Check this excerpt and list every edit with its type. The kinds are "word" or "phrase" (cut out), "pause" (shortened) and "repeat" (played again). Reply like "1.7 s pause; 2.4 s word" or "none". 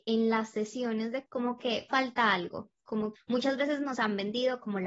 1.3 s word; 1.9 s phrase; 3.2 s word